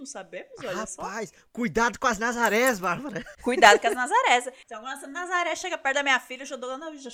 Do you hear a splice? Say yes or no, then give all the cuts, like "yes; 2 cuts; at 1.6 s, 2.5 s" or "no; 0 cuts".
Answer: no; 0 cuts